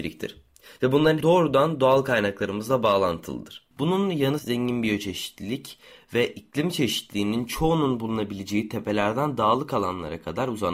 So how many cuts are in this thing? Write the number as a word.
three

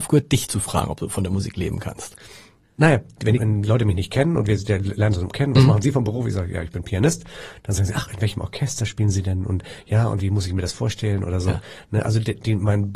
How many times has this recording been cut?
three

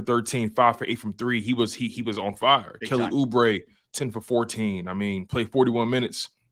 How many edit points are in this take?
zero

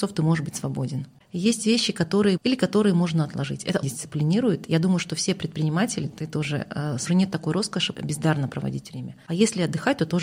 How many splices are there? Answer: five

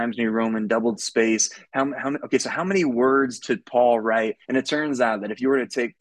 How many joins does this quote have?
two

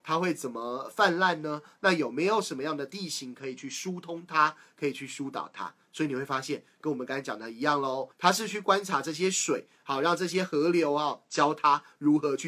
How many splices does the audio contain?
one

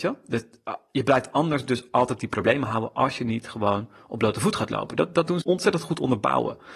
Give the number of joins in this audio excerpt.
one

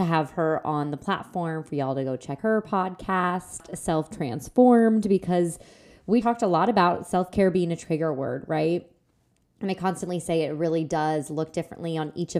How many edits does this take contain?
two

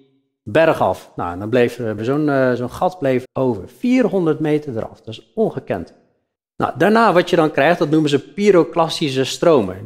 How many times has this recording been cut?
three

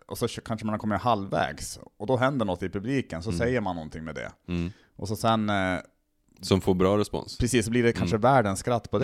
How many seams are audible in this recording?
zero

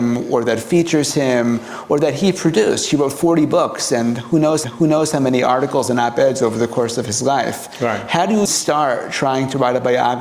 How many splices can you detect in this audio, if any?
two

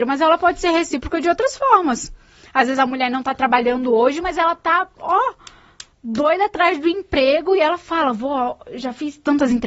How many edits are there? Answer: zero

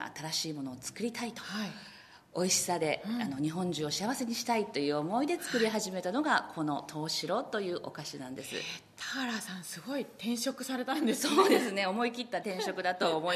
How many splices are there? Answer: one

